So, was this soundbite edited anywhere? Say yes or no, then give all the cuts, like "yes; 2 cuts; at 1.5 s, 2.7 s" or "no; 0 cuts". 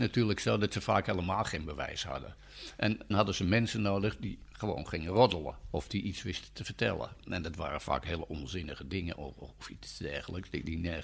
yes; 1 cut; at 3.1 s